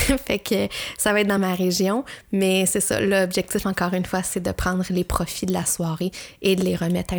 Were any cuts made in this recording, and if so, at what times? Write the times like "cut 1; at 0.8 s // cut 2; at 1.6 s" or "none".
none

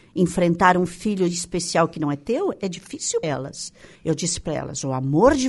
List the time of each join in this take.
cut 1; at 3.2 s // cut 2; at 4.0 s

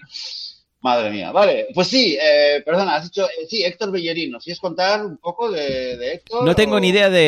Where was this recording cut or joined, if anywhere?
none

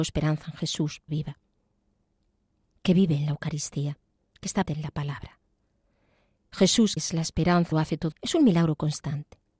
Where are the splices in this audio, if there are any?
cut 1; at 1.1 s // cut 2; at 4.6 s // cut 3; at 7.0 s // cut 4; at 7.7 s // cut 5; at 8.1 s

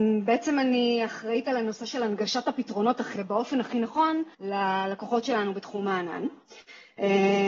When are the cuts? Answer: cut 1; at 3.2 s // cut 2; at 4.3 s

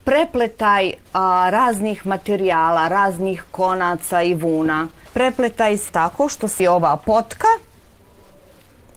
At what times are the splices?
cut 1; at 1.1 s // cut 2; at 5.1 s // cut 3; at 5.9 s // cut 4; at 6.6 s

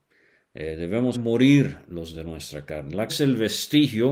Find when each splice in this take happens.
cut 1; at 1.1 s // cut 2; at 2.1 s // cut 3; at 3.1 s

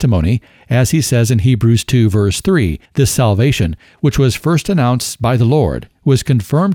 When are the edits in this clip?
cut 1; at 2.8 s

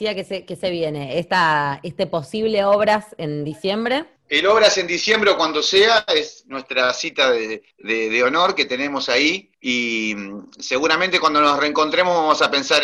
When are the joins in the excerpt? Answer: cut 1; at 9.5 s

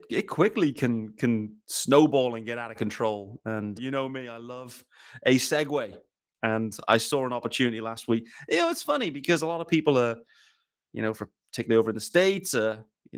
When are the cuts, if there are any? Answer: cut 1; at 3.8 s

